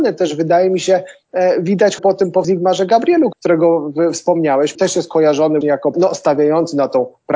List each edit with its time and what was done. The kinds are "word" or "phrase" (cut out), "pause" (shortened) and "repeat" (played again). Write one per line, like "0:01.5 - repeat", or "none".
0:02.0 - word
0:02.4 - word
0:03.3 - word
0:04.7 - word
0:05.6 - word
0:05.9 - word